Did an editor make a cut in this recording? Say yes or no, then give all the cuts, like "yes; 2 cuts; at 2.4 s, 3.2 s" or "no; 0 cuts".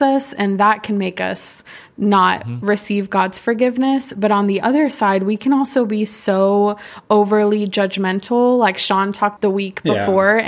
yes; 1 cut; at 9.4 s